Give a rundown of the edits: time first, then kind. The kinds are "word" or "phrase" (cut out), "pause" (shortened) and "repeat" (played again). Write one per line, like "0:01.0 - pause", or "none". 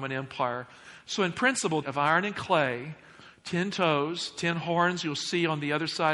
0:01.8 - phrase